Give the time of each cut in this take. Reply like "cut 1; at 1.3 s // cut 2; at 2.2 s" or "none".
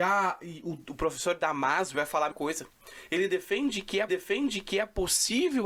cut 1; at 1.9 s // cut 2; at 2.3 s // cut 3; at 4.1 s